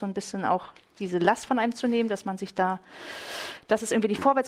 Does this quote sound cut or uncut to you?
uncut